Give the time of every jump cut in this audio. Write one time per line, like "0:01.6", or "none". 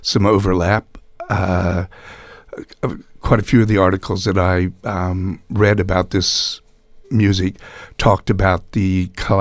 0:07.0